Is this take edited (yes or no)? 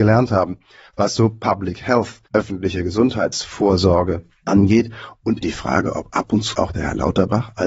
yes